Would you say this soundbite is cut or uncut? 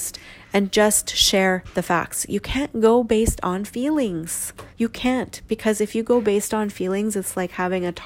cut